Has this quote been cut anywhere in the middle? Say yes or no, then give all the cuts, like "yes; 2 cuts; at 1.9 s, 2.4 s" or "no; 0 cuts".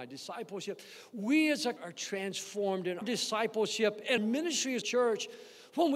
yes; 4 cuts; at 1.8 s, 3.0 s, 4.2 s, 4.8 s